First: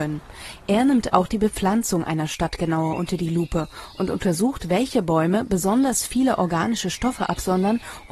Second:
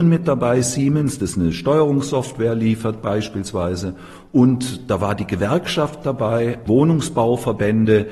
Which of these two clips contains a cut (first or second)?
second